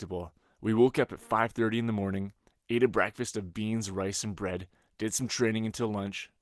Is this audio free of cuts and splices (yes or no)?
yes